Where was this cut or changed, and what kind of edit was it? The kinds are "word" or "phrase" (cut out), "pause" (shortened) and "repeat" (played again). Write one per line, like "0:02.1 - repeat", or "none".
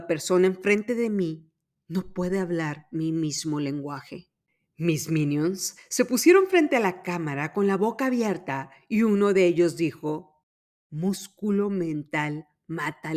0:04.5 - pause